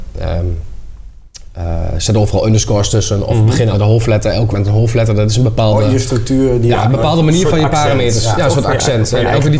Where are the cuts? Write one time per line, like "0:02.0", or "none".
0:03.7
0:04.5